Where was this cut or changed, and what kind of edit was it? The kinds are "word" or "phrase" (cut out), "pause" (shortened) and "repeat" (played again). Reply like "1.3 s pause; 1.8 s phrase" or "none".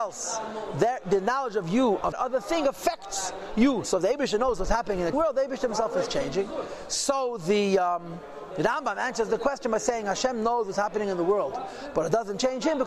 2.1 s word; 5.1 s word